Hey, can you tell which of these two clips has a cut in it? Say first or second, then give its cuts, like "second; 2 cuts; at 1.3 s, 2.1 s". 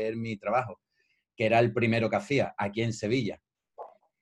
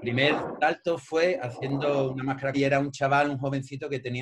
second; 1 cut; at 2.5 s